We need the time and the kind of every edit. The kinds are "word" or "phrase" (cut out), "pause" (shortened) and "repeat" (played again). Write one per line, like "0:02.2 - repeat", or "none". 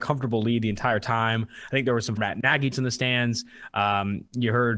0:02.2 - word
0:02.7 - word

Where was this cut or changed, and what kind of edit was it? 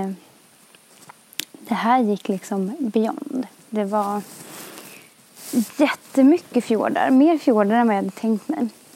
none

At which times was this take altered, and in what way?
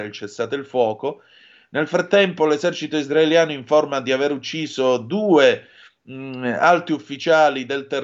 none

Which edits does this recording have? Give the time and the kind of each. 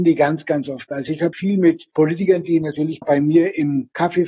0:01.3 - word
0:03.0 - phrase

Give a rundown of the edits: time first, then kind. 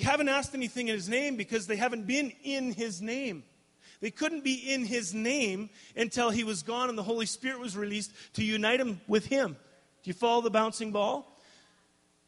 none

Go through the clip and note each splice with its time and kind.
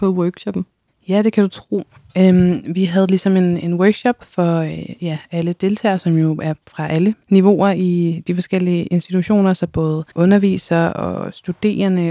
0:07.2 - pause
0:10.1 - pause

